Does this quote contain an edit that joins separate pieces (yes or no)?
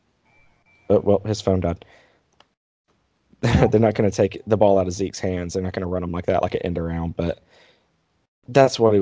no